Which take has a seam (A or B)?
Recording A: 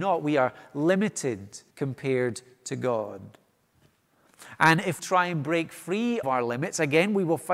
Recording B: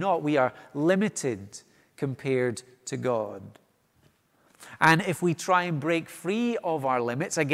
A